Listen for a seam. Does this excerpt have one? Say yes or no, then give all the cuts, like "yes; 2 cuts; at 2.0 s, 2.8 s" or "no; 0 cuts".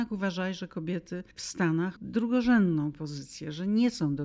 yes; 2 cuts; at 1.3 s, 2.0 s